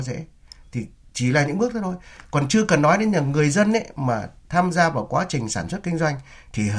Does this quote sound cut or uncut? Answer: uncut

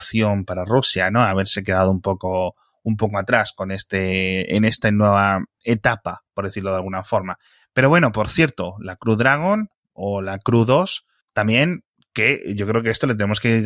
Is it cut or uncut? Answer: uncut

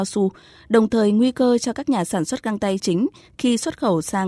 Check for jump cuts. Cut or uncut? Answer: cut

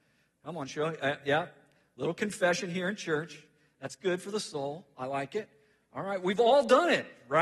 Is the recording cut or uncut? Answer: uncut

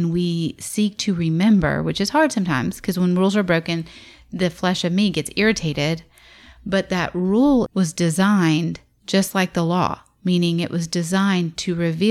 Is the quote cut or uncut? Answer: cut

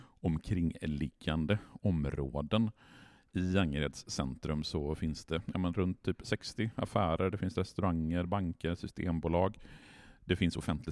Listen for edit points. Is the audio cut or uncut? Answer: uncut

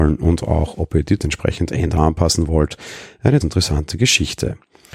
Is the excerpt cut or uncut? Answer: cut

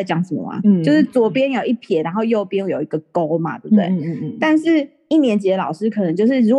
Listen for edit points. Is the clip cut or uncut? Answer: uncut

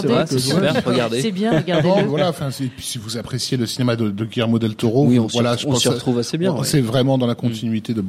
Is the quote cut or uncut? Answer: uncut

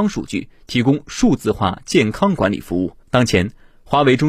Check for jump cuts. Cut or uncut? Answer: cut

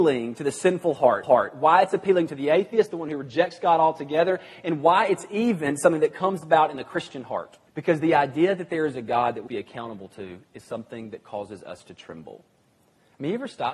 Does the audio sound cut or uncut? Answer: cut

